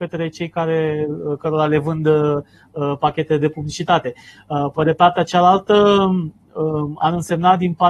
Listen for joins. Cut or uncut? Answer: uncut